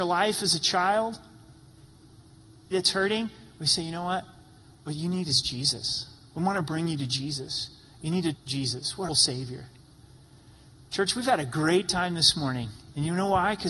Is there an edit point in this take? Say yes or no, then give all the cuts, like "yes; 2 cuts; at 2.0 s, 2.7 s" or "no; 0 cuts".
yes; 3 cuts; at 2.7 s, 8.3 s, 9.1 s